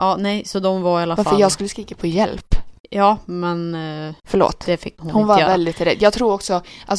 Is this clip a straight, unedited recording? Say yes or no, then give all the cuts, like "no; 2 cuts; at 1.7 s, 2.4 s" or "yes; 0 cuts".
no; 2 cuts; at 2.8 s, 4.2 s